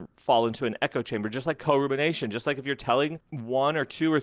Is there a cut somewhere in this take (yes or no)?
no